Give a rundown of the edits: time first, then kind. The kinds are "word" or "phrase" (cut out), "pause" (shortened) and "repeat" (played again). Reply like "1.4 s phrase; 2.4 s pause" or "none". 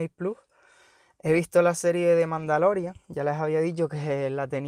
none